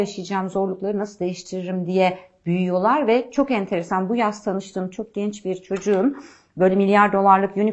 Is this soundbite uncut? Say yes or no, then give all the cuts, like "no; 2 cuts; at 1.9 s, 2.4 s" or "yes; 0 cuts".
yes; 0 cuts